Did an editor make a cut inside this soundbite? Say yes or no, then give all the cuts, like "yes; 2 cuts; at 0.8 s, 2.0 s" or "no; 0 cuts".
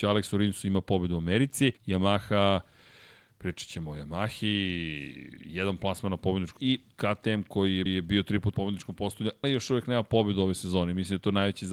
yes; 5 cuts; at 1.8 s, 6.6 s, 7.9 s, 8.5 s, 9.4 s